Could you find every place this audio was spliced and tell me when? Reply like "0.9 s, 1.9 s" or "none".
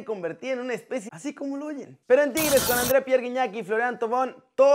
1.1 s, 2.0 s